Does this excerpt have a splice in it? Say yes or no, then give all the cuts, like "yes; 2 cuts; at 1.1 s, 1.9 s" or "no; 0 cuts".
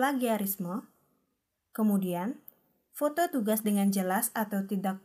no; 0 cuts